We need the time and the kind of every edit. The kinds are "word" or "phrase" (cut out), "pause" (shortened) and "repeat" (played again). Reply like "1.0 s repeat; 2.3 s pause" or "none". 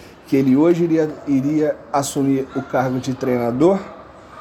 none